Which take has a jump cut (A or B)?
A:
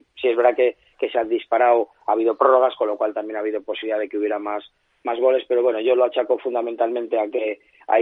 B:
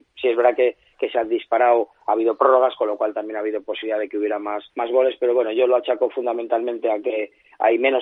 B